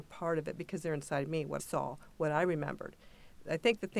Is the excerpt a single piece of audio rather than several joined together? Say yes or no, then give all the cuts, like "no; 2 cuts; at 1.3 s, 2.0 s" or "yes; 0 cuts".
no; 1 cut; at 1.6 s